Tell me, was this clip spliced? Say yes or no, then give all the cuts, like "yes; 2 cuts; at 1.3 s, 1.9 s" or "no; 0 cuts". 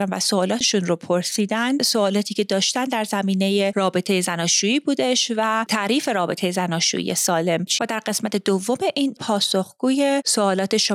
yes; 2 cuts; at 7.8 s, 9.2 s